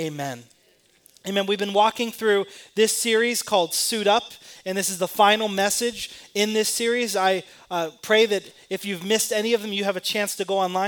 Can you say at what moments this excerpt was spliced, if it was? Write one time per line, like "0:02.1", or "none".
none